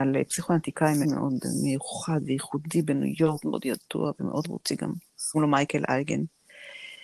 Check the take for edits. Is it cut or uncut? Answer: cut